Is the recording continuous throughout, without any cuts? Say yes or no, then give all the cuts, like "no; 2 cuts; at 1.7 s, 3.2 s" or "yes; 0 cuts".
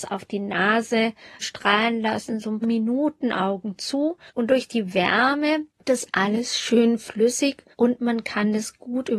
no; 5 cuts; at 1.4 s, 2.6 s, 4.3 s, 5.8 s, 7.7 s